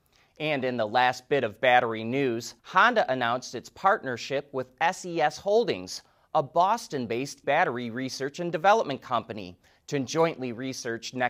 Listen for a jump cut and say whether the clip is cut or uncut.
cut